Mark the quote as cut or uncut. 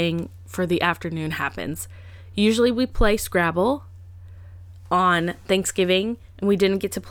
uncut